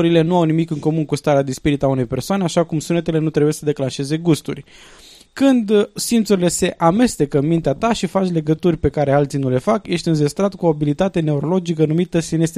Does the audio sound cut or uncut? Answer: uncut